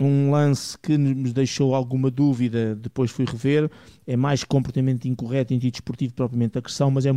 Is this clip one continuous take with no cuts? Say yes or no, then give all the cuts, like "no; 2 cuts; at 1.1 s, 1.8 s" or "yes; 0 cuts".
yes; 0 cuts